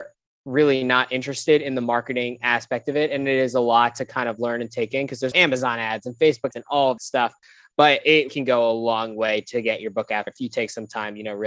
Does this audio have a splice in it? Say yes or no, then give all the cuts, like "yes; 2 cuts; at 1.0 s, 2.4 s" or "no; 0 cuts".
yes; 5 cuts; at 5.3 s, 6.5 s, 7.0 s, 8.3 s, 10.3 s